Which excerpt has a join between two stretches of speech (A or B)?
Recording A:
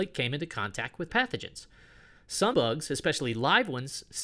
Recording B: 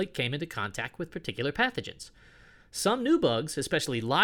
A